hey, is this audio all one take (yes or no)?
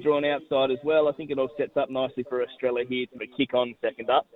no